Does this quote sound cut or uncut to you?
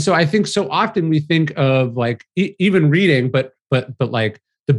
uncut